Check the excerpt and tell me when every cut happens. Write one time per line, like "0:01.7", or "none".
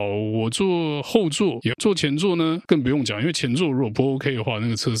0:01.7